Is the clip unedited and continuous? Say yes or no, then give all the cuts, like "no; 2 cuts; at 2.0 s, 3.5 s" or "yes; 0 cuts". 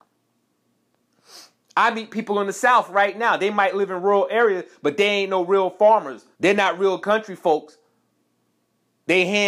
no; 1 cut; at 6.3 s